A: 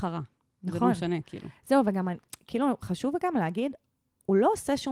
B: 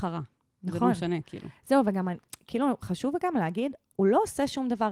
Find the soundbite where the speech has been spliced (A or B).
B